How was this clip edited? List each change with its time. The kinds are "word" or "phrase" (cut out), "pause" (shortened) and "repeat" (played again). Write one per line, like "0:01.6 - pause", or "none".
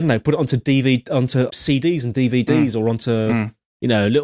0:01.5 - phrase